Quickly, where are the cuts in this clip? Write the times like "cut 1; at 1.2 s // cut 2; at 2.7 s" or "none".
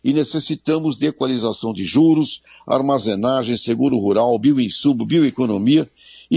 none